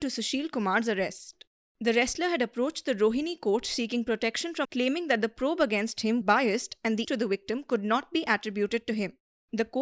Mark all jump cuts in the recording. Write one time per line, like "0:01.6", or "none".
0:04.6
0:06.2
0:07.0